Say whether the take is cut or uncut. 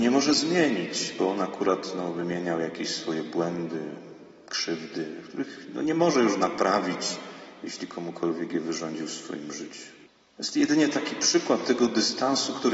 cut